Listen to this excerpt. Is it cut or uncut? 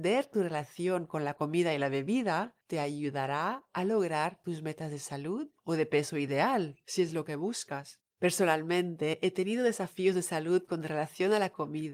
cut